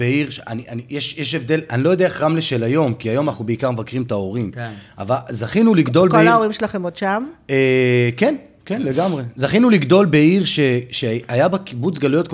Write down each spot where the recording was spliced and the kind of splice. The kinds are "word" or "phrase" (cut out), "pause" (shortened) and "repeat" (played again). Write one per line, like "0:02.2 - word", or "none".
none